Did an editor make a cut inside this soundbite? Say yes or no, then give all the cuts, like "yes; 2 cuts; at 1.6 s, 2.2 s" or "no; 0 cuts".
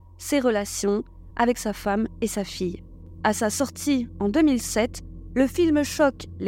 no; 0 cuts